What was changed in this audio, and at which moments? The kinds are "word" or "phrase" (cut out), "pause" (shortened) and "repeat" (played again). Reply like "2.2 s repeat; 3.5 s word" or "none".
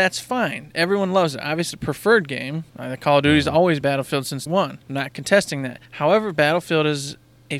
1.7 s word; 2.7 s pause; 3.8 s word; 4.5 s word; 4.8 s pause; 5.9 s pause